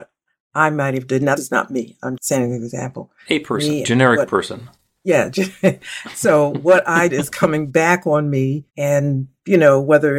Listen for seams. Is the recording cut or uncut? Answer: cut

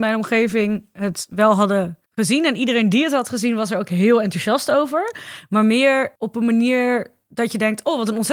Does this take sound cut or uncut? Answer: cut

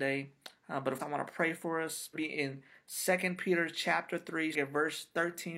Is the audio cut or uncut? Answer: cut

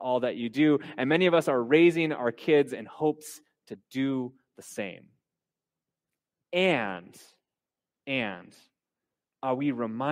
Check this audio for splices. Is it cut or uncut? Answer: uncut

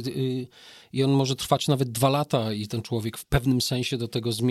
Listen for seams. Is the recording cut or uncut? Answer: uncut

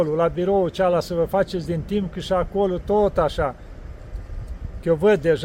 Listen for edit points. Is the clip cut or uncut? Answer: uncut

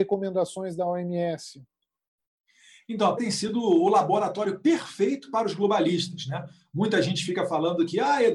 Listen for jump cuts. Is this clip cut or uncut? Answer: cut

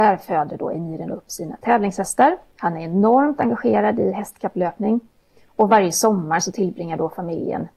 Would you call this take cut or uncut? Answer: uncut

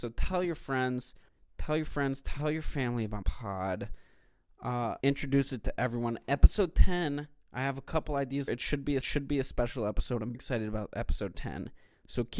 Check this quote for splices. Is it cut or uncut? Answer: cut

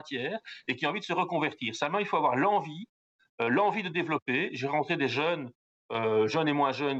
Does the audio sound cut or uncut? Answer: uncut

